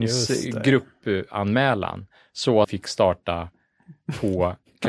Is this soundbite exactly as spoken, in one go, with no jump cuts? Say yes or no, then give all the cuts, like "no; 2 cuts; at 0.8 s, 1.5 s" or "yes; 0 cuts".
no; 1 cut; at 2.6 s